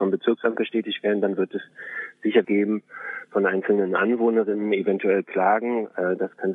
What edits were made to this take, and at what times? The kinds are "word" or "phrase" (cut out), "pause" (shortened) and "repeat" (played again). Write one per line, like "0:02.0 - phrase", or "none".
0:02.4 - word